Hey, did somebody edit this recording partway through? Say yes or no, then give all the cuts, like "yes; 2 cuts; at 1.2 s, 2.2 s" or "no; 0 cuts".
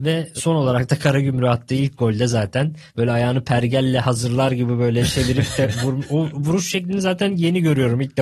yes; 1 cut; at 2.9 s